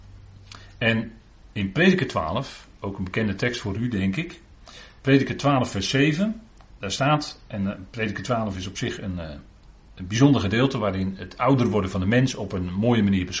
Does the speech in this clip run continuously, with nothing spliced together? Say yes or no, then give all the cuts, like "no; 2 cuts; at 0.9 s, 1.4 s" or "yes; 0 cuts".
yes; 0 cuts